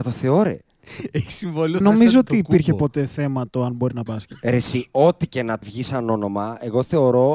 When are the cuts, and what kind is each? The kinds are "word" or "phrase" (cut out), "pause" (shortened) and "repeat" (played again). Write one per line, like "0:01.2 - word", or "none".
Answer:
0:01.8 - word
0:04.1 - word
0:05.6 - word